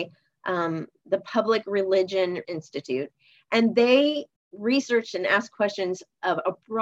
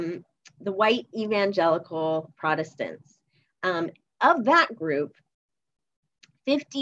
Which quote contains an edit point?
first; 2 cuts; at 2.4 s, 4.4 s

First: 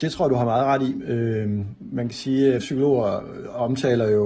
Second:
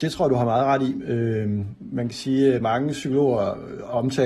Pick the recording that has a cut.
first; 1 cut; at 2.6 s

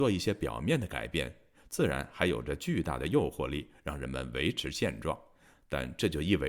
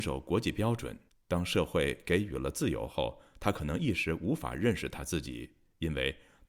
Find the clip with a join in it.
second; 1 cut; at 1.1 s

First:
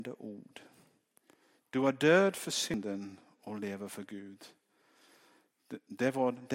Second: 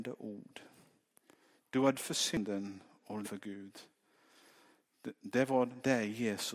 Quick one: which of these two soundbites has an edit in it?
second; 2 cuts; at 1.9 s, 3.2 s

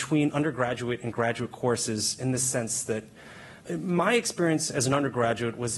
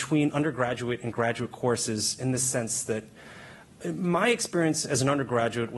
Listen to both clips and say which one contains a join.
first; 1 cut; at 3.6 s

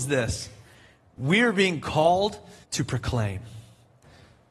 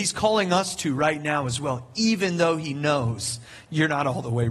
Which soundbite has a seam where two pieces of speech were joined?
first; 1 cut; at 2.6 s

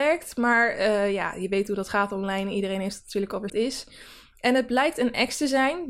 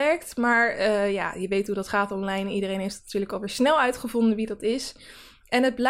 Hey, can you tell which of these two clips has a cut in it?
first; 1 cut; at 3.5 s

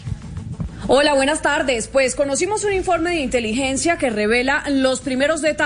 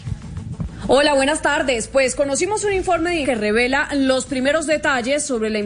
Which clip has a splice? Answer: second; 1 cut; at 3.2 s

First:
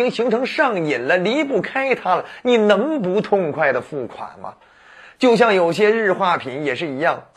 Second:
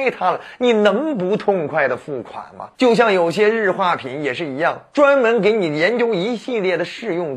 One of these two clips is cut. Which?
second; 1 cut; at 2.7 s

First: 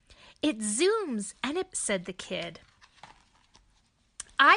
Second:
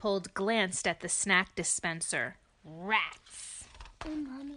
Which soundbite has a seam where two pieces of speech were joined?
first; 1 cut; at 1.7 s

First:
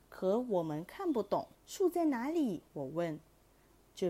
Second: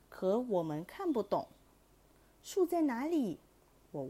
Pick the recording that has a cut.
first; 2 cuts; at 1.5 s, 2.7 s

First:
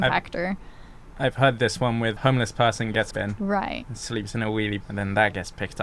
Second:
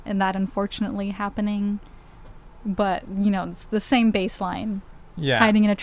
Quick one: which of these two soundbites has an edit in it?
first; 3 cuts; at 2.2 s, 3.1 s, 4.8 s

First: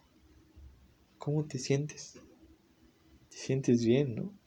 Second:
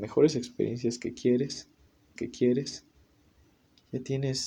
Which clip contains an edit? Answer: second; 1 cut; at 2.2 s

